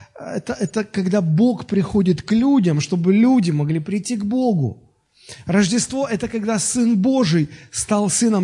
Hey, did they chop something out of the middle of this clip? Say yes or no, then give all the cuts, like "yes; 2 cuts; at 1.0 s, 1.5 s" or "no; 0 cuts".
no; 0 cuts